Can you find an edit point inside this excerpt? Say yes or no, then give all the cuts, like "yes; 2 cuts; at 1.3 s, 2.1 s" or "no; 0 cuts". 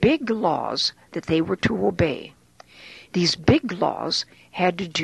no; 0 cuts